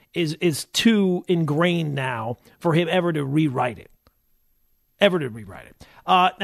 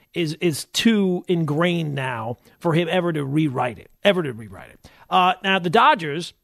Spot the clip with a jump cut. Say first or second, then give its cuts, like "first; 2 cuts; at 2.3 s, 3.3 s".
second; 1 cut; at 4.0 s